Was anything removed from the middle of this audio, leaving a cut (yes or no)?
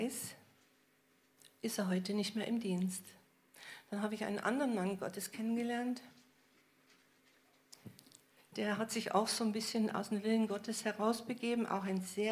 no